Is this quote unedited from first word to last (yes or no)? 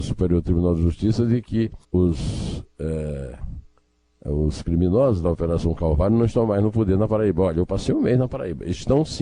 no